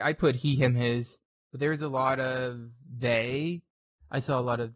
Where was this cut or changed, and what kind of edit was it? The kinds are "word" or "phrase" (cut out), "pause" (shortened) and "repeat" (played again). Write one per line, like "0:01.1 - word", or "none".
none